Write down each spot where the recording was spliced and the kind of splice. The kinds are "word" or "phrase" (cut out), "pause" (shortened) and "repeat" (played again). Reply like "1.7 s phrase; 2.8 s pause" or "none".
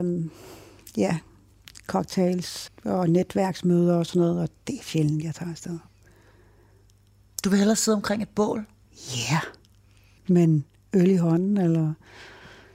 2.7 s word